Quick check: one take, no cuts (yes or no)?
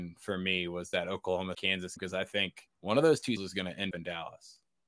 no